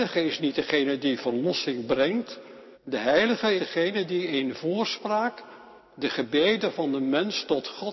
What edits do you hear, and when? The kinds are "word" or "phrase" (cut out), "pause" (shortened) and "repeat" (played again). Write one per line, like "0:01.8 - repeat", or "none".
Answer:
0:02.7 - pause
0:03.6 - word
0:05.8 - pause